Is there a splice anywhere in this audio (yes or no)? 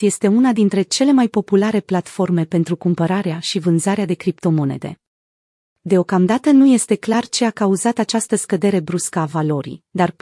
no